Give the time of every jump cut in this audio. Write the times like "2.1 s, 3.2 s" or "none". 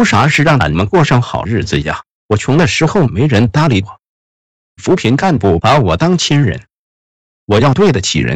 none